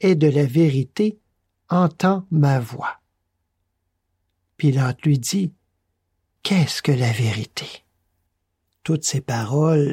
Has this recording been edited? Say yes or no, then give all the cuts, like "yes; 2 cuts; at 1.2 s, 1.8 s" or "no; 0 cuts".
no; 0 cuts